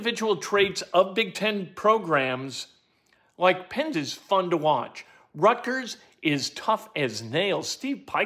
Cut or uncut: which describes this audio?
cut